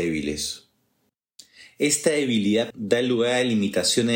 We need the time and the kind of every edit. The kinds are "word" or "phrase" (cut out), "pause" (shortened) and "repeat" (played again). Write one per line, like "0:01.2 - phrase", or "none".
0:02.7 - word

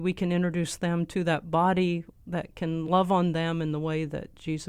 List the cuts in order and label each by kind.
none

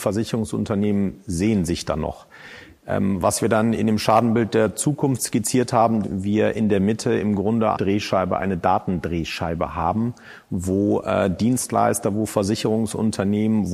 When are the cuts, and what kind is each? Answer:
0:06.0 - word
0:07.7 - word

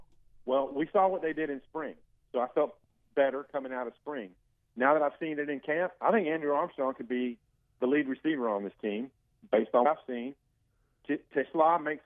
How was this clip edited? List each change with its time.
0:09.8 - word

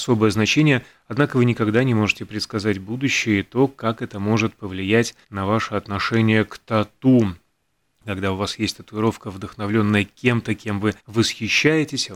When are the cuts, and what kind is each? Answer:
0:05.2 - pause
0:11.0 - pause

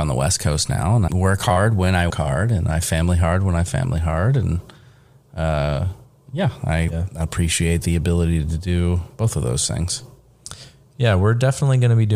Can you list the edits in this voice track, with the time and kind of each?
0:01.1 - word
0:02.1 - word
0:06.9 - word

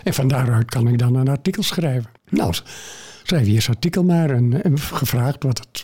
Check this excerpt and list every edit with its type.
0:02.2 - pause

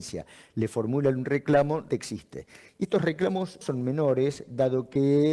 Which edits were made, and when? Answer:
0:01.9 - word
0:03.6 - word

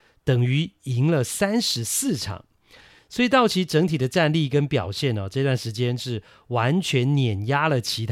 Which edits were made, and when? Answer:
none

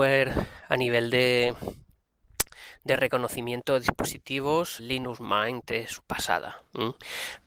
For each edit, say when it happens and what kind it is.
0:04.8 - word
0:06.0 - word

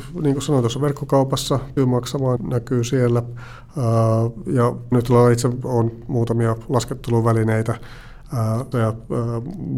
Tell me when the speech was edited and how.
0:01.8 - word
0:02.4 - word
0:04.9 - word
0:06.0 - word
0:08.7 - word

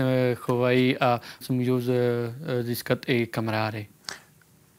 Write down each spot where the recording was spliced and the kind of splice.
0:01.4 - word

